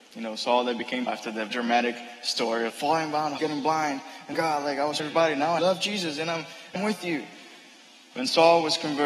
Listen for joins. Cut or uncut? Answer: cut